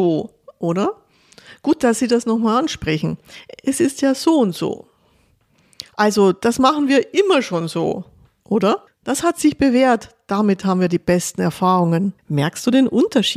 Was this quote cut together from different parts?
yes; 2 cuts; at 8.9 s, 12.2 s

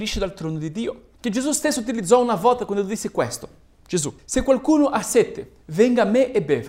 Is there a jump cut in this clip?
yes; 2 cuts; at 1.1 s, 4.2 s

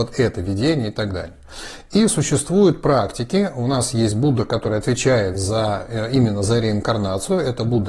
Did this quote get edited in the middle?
no; 0 cuts

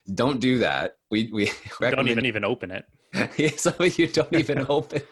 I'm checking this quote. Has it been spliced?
yes; 2 cuts; at 1.8 s, 2.2 s

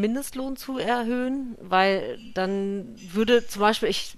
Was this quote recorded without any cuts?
yes; 0 cuts

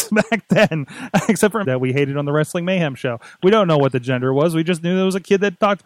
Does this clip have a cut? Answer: yes; 1 cut; at 1.6 s

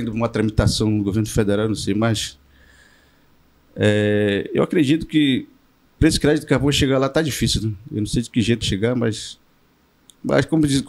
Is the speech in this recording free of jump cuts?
no; 1 cut; at 8.6 s

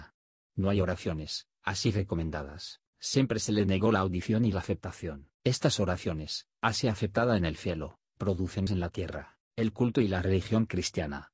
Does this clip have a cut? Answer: yes; 3 cuts; at 5.4 s, 8.7 s, 9.4 s

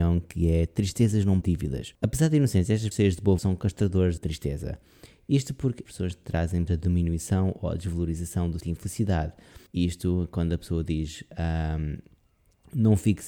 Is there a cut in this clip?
yes; 9 cuts; at 1.4 s, 1.9 s, 2.9 s, 3.4 s, 4.2 s, 5.9 s, 6.7 s, 8.6 s, 9.7 s

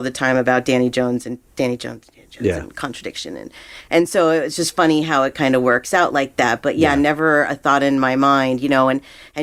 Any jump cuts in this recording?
no; 0 cuts

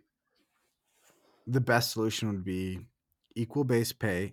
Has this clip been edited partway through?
no; 0 cuts

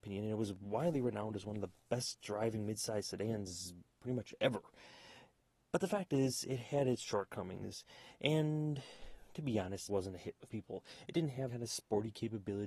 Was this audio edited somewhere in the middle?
yes; 4 cuts; at 4.0 s, 9.9 s, 10.5 s, 11.5 s

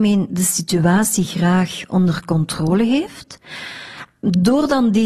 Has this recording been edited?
no; 0 cuts

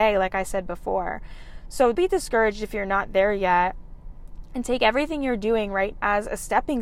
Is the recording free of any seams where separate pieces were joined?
no; 2 cuts; at 1.9 s, 5.9 s

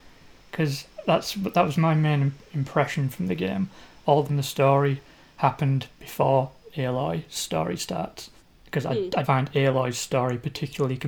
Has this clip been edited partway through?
yes; 3 cuts; at 4.3 s, 8.4 s, 9.2 s

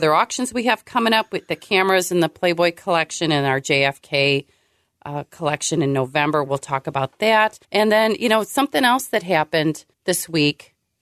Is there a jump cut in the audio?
yes; 2 cuts; at 7.6 s, 9.9 s

